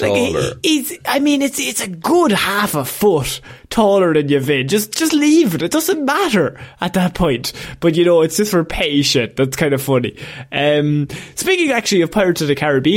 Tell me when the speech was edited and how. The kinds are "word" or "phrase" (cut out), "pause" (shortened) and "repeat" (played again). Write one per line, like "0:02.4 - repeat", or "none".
none